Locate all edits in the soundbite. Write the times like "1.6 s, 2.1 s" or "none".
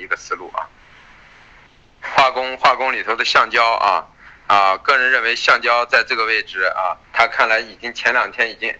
7.0 s

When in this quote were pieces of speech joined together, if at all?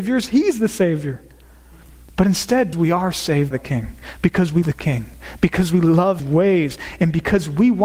2.7 s, 3.5 s, 4.6 s, 6.2 s

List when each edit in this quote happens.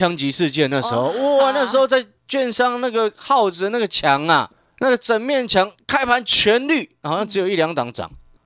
none

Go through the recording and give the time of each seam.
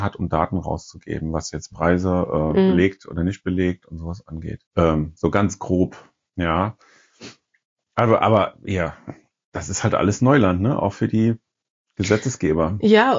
4.7 s

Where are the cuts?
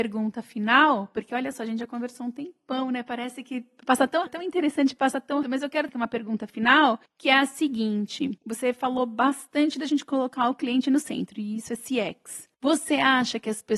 4.3 s, 5.4 s, 5.9 s, 7.1 s, 8.4 s, 12.5 s

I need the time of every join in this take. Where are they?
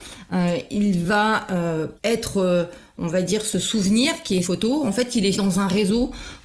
2.0 s, 4.4 s, 5.3 s

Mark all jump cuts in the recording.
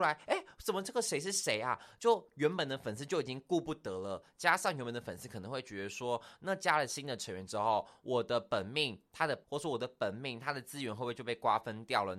9.4 s

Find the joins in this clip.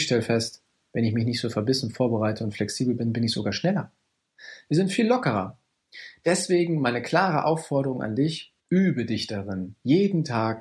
8.6 s

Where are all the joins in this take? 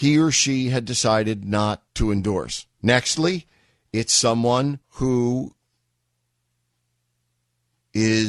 1.9 s, 2.7 s, 4.8 s

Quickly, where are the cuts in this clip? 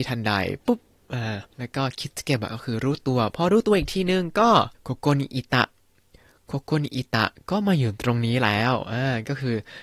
1.5 s, 4.7 s

